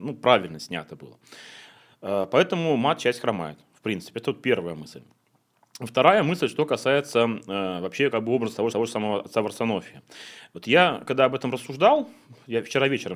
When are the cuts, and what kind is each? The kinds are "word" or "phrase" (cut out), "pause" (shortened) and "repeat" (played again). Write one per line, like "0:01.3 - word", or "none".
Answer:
0:08.7 - repeat